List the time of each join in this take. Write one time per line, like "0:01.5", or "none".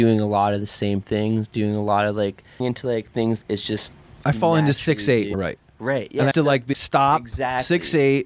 0:02.6
0:03.4
0:05.3
0:06.3
0:06.7